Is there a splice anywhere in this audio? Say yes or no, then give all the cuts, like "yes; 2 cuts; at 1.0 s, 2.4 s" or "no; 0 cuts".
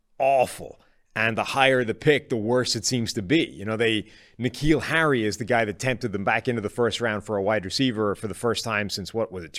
no; 0 cuts